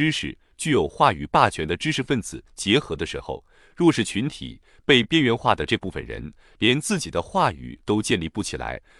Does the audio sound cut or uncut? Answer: uncut